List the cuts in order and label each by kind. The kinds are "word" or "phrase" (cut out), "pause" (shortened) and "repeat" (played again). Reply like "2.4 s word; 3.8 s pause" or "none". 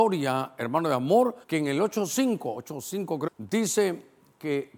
1.4 s pause; 3.3 s phrase